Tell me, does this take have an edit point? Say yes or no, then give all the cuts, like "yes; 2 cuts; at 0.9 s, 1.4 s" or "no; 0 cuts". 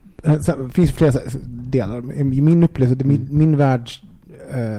no; 0 cuts